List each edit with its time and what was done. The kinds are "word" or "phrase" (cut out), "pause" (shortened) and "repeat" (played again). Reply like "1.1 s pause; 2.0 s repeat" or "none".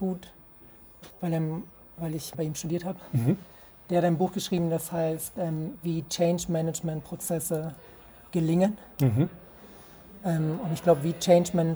1.1 s word; 2.3 s word